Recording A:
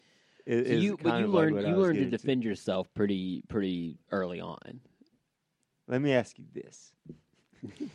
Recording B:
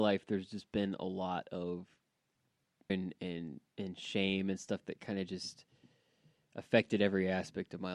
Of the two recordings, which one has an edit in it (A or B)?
B